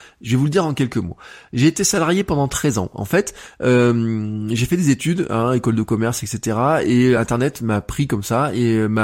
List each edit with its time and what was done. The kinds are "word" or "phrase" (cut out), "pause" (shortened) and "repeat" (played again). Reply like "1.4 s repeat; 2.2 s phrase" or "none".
none